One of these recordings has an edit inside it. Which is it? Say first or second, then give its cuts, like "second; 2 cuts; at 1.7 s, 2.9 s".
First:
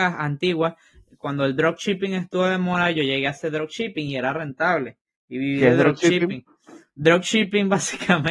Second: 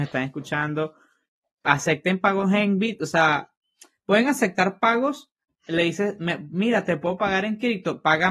first; 1 cut; at 5.2 s